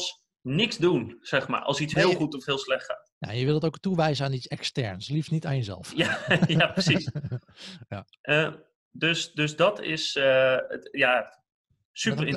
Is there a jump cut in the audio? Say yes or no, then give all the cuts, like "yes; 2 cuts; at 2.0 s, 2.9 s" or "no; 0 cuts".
no; 0 cuts